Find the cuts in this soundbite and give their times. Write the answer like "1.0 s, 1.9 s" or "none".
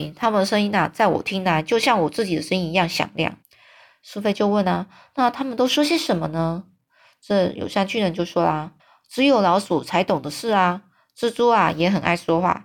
3.4 s, 8.8 s